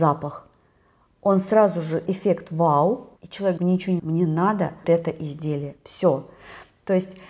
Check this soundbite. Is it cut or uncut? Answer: cut